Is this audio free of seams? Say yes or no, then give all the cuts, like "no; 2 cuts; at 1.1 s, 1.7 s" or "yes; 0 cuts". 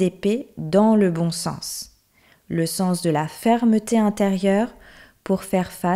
yes; 0 cuts